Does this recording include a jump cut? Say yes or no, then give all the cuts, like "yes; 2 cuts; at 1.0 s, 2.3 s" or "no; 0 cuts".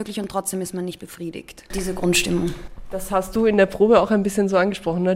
no; 0 cuts